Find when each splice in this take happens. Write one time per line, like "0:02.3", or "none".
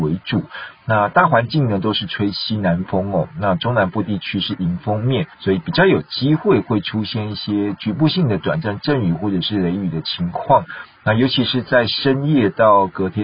0:05.3